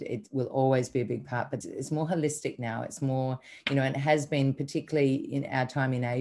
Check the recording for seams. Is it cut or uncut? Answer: cut